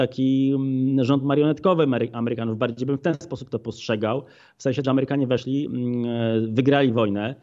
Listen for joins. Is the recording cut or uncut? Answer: cut